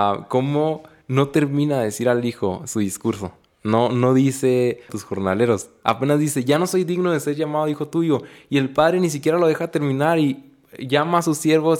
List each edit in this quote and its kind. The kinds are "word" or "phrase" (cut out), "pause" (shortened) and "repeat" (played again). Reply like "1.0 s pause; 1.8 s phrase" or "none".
4.9 s phrase

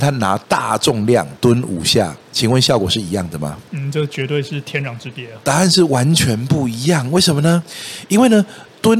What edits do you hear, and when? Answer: 3.7 s pause

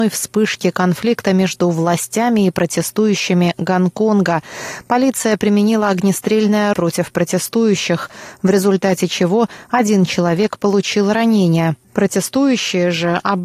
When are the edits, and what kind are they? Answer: 6.7 s word; 11.8 s pause

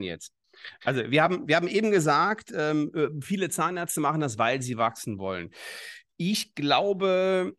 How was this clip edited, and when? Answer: none

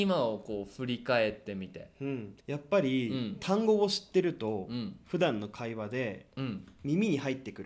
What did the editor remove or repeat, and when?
2.4 s pause

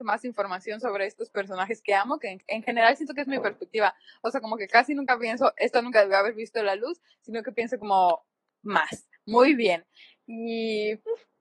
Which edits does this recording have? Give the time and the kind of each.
none

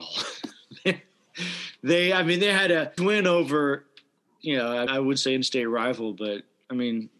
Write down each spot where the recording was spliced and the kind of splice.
3.0 s word; 4.9 s word

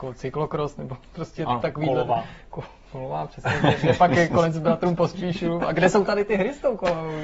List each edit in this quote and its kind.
none

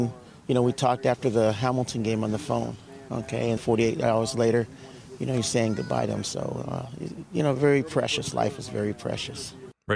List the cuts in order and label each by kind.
3.6 s word

